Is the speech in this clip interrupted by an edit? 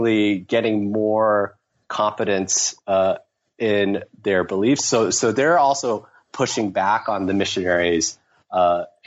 no; 0 cuts

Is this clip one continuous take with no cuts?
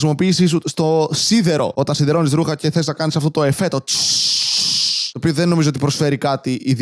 yes; 0 cuts

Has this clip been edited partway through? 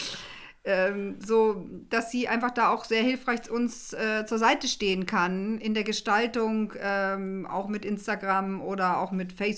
no; 0 cuts

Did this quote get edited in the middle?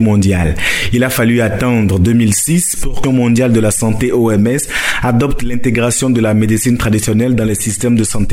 yes; 1 cut; at 3.0 s

